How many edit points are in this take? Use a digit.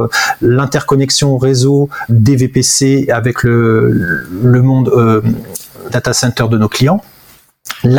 3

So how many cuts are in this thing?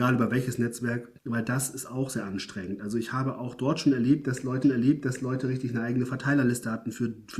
2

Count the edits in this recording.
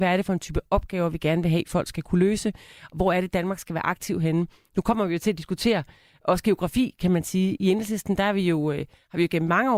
0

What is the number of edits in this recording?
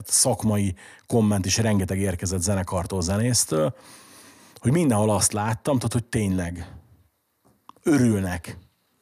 0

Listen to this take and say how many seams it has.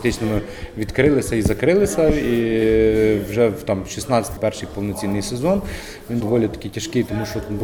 2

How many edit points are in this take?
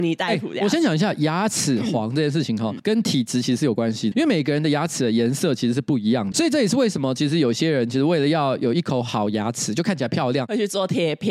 3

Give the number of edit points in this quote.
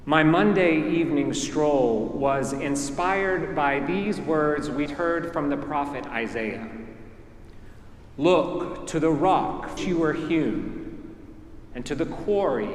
2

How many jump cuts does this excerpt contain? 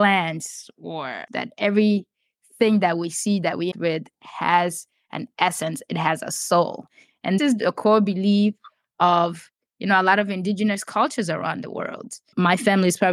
3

